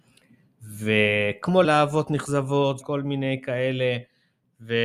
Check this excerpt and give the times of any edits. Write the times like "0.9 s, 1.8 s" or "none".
1.6 s, 2.8 s